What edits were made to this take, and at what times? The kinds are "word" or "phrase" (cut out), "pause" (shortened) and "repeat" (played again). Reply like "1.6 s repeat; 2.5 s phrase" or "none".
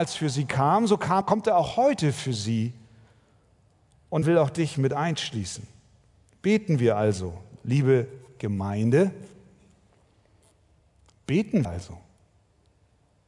1.2 s word; 4.2 s word; 11.6 s word

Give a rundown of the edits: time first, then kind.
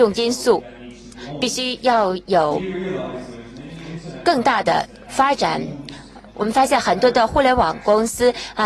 6.3 s pause

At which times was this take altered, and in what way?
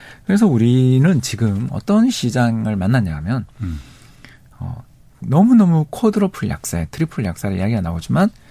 none

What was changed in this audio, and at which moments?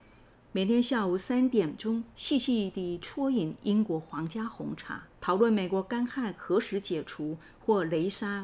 5.1 s pause

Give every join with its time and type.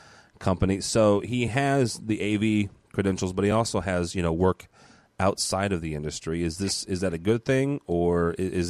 none

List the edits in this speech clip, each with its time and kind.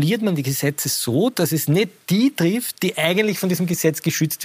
none

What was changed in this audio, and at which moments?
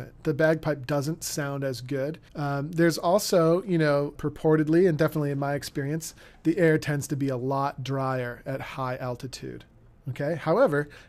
2.3 s pause; 4.1 s word

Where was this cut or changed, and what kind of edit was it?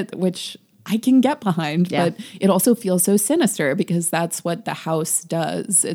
none

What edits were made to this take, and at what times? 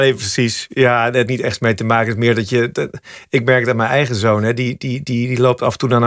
1.3 s phrase

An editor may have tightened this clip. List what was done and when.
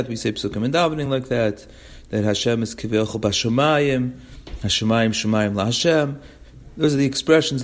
none

